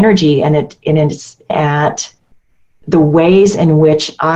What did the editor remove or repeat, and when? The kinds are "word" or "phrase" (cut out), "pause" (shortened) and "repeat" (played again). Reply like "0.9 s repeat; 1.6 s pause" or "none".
1.5 s word